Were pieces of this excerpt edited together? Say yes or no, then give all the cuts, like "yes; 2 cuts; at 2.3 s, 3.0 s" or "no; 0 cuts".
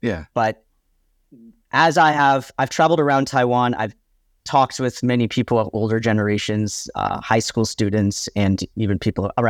no; 0 cuts